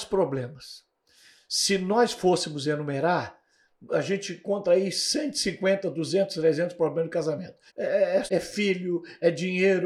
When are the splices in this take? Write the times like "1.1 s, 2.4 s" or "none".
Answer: 3.9 s, 7.7 s, 8.3 s